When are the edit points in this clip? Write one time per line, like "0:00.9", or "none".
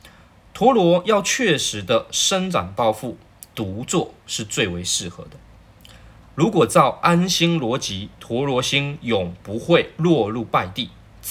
none

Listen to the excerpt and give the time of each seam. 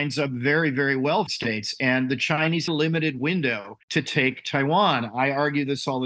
0:01.3
0:02.7
0:03.8

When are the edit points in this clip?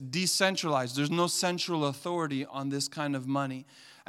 none

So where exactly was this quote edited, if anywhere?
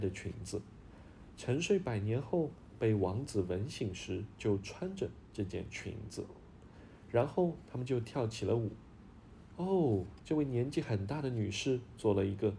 0:10.2

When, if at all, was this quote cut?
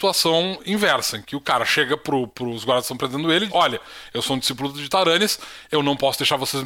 0:03.5

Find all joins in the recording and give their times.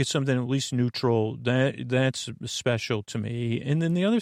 none

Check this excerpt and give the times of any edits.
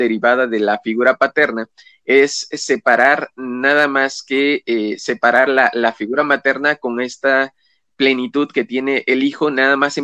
none

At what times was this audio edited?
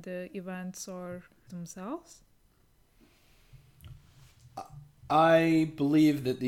0:01.5

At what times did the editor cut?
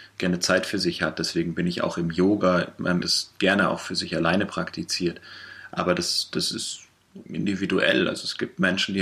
0:03.0
0:07.3

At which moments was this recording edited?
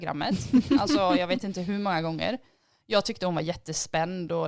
none

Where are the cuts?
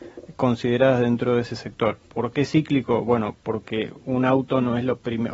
0:02.0

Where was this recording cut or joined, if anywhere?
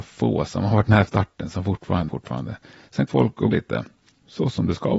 0:01.1
0:02.1
0:03.1
0:03.5

